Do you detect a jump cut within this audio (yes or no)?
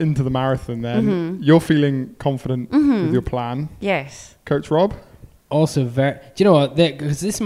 no